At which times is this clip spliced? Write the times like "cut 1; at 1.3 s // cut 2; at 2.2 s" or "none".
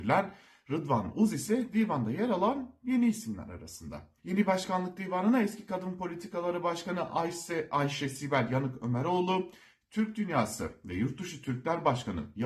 cut 1; at 4.2 s